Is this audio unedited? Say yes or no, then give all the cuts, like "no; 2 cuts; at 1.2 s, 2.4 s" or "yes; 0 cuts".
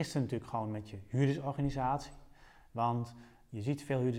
yes; 0 cuts